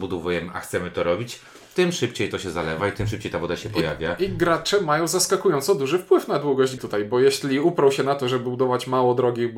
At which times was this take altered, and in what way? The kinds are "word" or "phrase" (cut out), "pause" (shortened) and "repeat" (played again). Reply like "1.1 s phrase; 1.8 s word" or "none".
6.8 s word